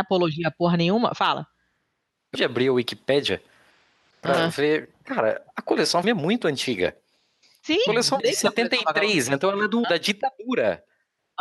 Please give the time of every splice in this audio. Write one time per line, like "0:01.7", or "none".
0:02.3
0:06.0
0:07.9
0:08.2
0:09.8